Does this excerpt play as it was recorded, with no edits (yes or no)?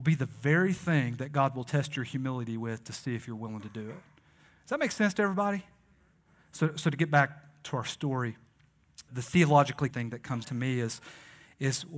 no